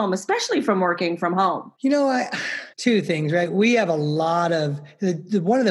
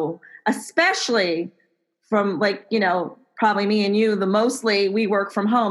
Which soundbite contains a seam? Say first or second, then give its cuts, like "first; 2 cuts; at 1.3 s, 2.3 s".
first; 2 cuts; at 1.8 s, 2.7 s